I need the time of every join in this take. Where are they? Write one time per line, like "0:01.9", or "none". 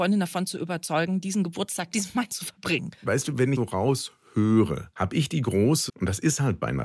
0:01.9
0:03.0
0:03.6
0:04.9
0:05.9